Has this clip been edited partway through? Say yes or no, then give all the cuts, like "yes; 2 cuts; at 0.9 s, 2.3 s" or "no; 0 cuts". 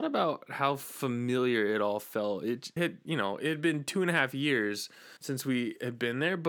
yes; 2 cuts; at 2.8 s, 5.2 s